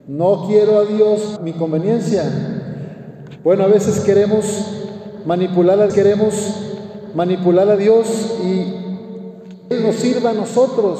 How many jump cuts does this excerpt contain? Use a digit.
3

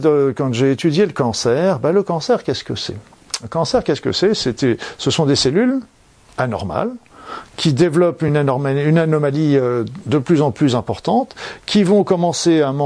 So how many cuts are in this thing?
0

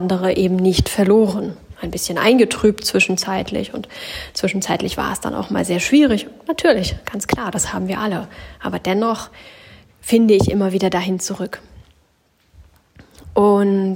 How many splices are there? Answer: 0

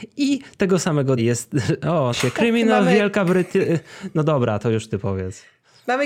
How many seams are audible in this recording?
2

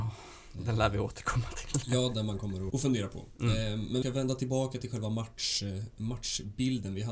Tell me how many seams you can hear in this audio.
2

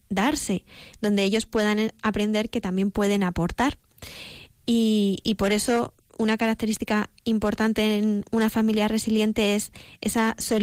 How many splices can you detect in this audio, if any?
0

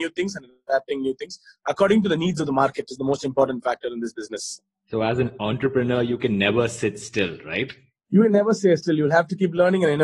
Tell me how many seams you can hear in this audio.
0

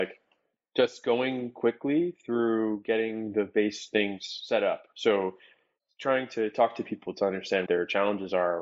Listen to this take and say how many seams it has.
2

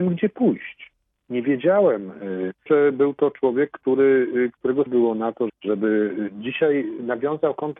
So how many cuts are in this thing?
3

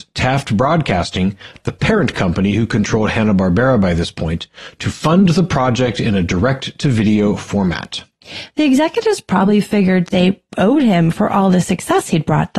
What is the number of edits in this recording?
0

